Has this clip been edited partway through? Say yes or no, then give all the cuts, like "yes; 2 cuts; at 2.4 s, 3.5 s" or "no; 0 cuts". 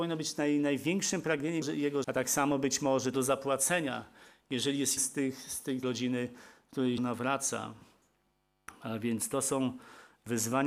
yes; 6 cuts; at 1.6 s, 2.0 s, 3.1 s, 5.0 s, 5.8 s, 7.0 s